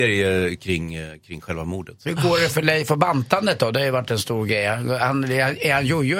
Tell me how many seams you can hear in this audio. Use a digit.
1